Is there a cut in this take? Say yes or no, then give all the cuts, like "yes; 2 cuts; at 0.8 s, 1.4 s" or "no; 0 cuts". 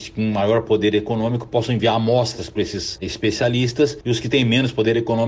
no; 0 cuts